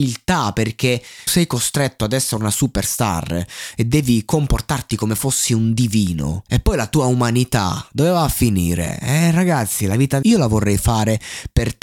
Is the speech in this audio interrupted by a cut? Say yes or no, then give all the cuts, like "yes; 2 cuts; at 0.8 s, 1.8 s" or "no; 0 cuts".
yes; 3 cuts; at 1.3 s, 6.5 s, 10.2 s